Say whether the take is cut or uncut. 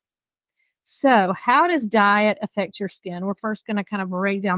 uncut